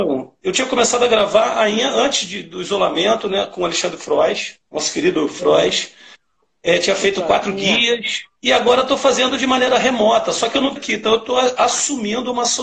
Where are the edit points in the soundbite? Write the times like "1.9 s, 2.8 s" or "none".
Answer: 4.6 s, 8.4 s, 10.8 s